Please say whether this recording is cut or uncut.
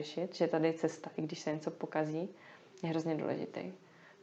uncut